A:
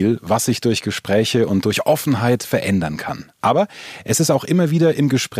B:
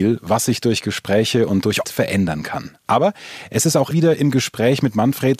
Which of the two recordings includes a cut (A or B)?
B